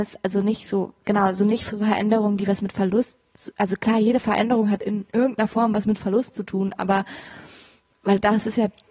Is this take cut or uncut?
uncut